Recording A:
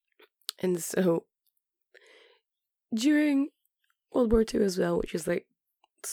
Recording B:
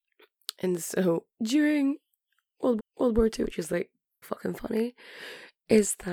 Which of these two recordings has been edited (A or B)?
B